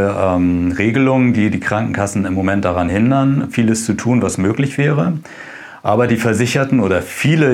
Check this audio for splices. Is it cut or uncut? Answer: uncut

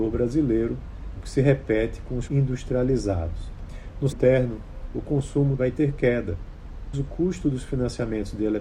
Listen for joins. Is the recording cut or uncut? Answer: cut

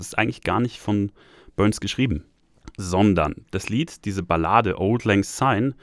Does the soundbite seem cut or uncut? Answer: uncut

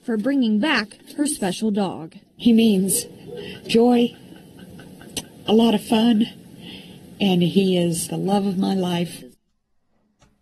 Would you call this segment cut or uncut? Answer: cut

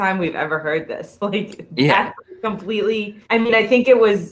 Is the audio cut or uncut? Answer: cut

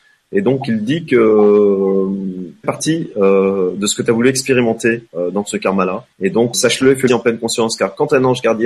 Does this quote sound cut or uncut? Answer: cut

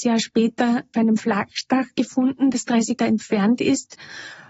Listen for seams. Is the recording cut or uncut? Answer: cut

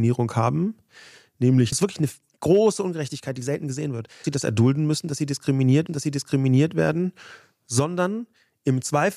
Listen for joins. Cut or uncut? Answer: cut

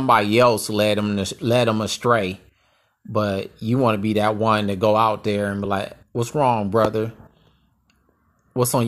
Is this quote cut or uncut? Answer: uncut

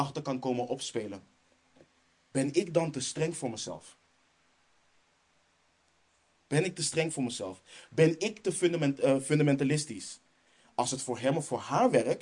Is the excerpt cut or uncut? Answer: uncut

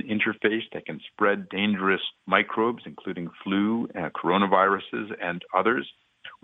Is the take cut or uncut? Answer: cut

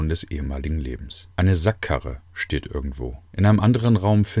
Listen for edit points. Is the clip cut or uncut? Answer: cut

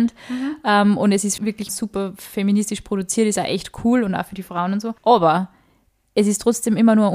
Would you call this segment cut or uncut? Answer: cut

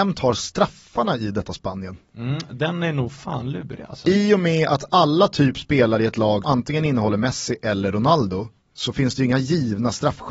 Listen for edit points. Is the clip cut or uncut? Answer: cut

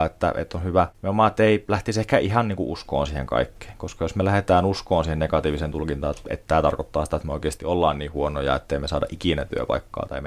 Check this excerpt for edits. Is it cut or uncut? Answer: cut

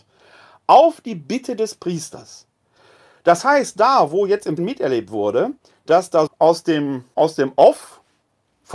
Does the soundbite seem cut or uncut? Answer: cut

